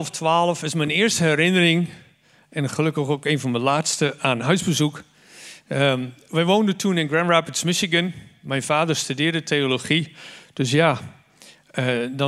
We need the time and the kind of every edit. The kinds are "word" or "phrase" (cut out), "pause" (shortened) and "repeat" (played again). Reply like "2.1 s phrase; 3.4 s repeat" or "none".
none